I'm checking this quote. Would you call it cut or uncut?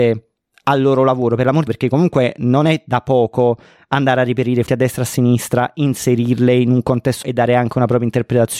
cut